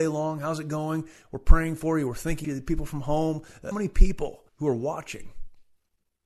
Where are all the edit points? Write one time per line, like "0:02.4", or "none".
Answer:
0:02.4
0:03.7
0:04.5